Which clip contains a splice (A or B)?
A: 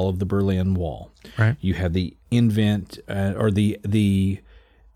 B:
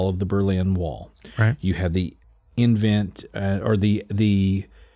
A